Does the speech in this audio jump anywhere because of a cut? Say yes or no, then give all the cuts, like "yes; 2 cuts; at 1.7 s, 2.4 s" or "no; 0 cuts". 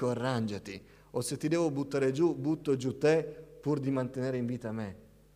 no; 0 cuts